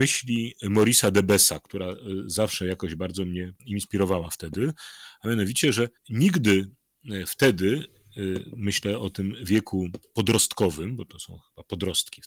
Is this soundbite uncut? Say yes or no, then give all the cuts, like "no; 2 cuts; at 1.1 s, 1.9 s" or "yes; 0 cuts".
no; 2 cuts; at 3.6 s, 6.0 s